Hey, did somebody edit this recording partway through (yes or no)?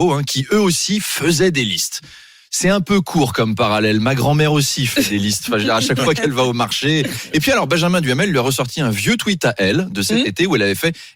no